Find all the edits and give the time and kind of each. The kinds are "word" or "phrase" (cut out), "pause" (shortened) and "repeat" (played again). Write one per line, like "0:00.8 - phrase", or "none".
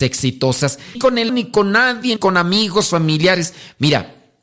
0:00.9 - word
0:01.3 - word
0:02.2 - word